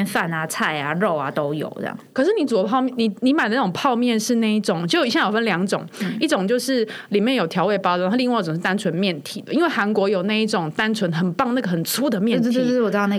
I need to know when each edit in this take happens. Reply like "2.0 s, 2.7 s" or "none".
none